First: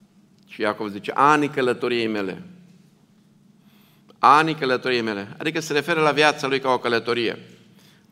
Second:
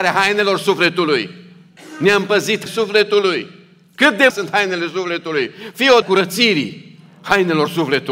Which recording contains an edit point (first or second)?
second